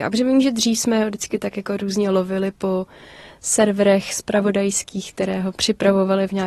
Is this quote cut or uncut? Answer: uncut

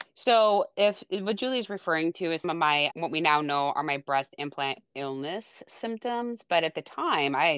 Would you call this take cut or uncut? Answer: cut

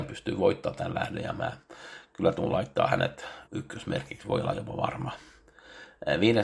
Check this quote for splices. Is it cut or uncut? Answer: cut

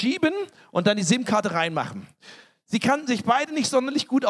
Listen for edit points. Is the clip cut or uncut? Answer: uncut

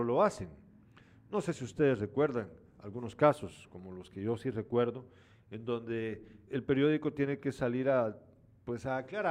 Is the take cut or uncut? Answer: cut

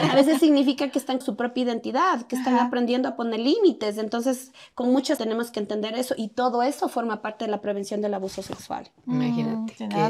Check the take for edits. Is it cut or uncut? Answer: cut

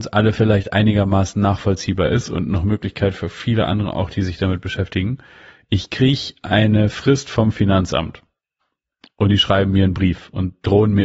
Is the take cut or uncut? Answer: uncut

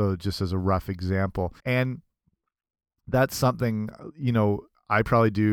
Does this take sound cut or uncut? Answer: cut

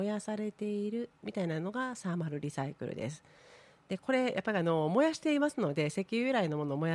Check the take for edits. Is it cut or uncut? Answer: uncut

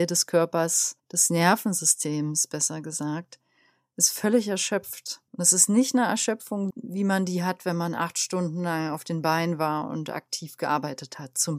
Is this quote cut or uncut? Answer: cut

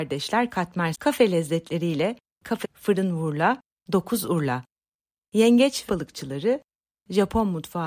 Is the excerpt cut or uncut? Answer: cut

